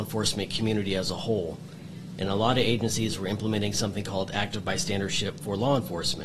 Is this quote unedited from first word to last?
yes; 0 cuts

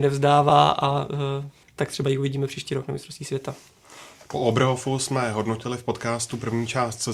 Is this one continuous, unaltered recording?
yes; 0 cuts

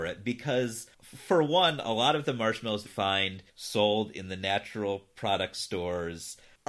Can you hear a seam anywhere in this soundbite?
yes; 3 cuts; at 0.9 s, 2.9 s, 3.5 s

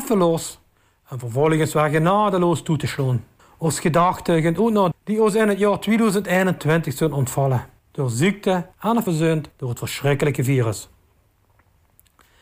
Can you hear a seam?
yes; 6 cuts; at 3.4 s, 4.9 s, 7.8 s, 8.7 s, 9.1 s, 9.5 s

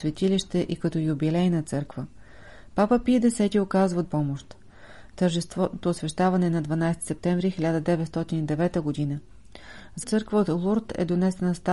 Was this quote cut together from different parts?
yes; 3 cuts; at 4.0 s, 5.8 s, 10.0 s

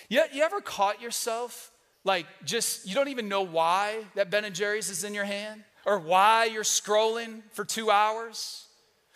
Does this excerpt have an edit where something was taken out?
yes; 2 cuts; at 1.9 s, 5.7 s

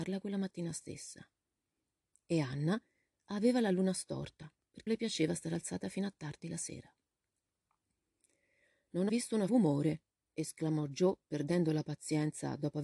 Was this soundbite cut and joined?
yes; 3 cuts; at 4.9 s, 9.1 s, 9.5 s

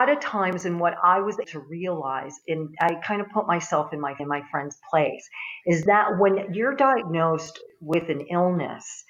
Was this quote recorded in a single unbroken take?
no; 3 cuts; at 1.4 s, 4.2 s, 5.9 s

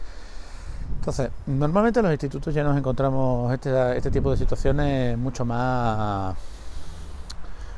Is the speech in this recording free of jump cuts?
yes; 0 cuts

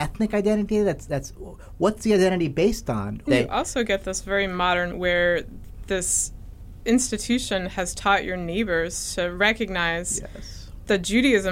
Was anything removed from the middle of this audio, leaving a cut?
yes; 1 cut; at 4.9 s

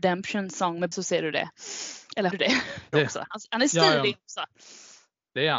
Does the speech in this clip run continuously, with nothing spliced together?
no; 3 cuts; at 0.9 s, 2.3 s, 2.9 s

